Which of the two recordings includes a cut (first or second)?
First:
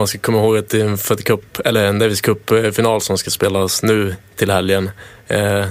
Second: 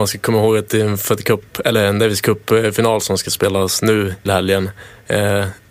second